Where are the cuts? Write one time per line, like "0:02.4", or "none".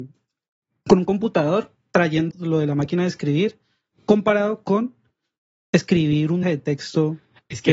0:02.3
0:06.4